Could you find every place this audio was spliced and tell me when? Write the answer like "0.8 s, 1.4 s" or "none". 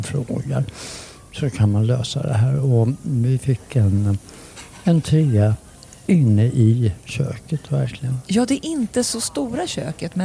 none

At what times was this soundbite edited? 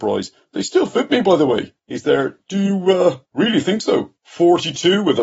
1.8 s, 3.2 s, 4.2 s

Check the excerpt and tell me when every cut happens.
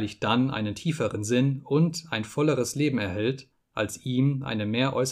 none

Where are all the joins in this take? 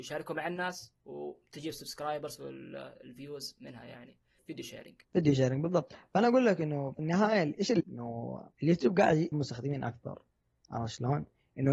1.0 s, 4.4 s, 5.0 s, 7.8 s, 8.5 s, 9.3 s

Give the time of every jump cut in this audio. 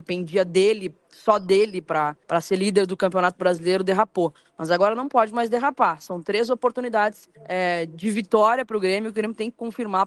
1.0 s, 2.2 s, 7.3 s

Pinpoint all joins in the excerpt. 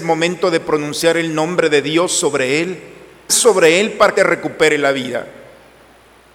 3.3 s, 4.2 s

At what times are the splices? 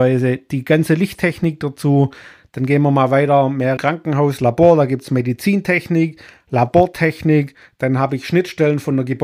3.8 s

